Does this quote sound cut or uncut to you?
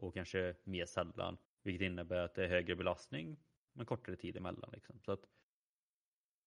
cut